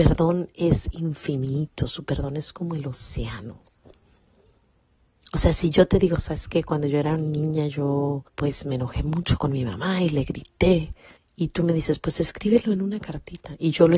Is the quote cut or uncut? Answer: cut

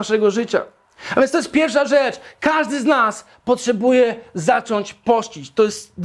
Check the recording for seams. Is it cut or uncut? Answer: uncut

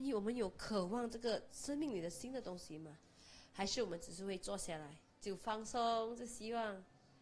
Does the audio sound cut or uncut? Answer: cut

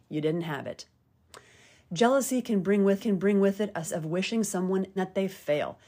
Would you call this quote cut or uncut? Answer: cut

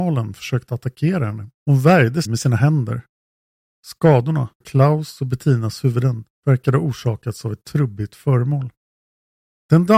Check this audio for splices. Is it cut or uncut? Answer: cut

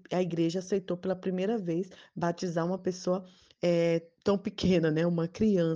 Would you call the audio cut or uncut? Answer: uncut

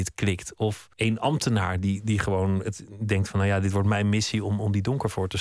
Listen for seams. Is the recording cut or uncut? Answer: cut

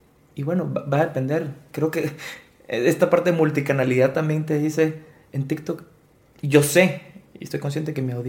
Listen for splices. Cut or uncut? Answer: uncut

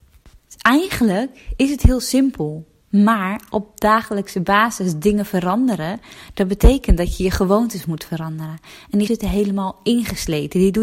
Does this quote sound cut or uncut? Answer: cut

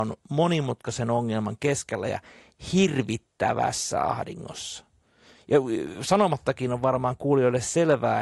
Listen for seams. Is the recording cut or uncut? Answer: uncut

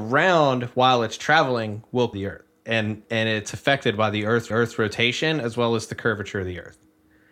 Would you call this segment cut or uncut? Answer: cut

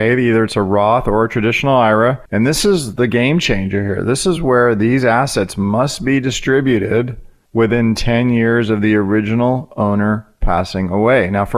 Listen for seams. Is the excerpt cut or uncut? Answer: uncut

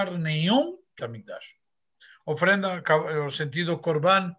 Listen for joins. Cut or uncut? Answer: cut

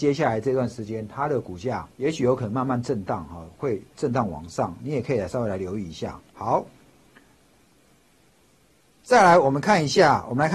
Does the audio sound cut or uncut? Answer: cut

